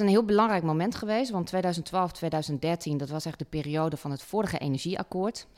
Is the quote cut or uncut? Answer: uncut